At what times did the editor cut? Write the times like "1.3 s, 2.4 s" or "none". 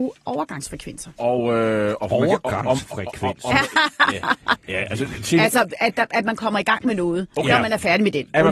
4.6 s